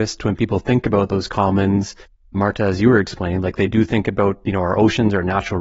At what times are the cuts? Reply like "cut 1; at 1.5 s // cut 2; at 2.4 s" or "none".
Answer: none